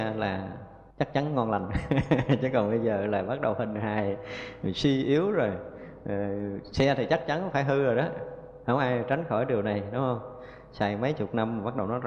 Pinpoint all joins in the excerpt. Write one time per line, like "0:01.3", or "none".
0:00.9